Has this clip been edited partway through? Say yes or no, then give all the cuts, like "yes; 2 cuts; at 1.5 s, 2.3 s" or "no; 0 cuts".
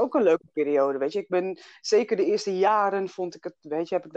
no; 0 cuts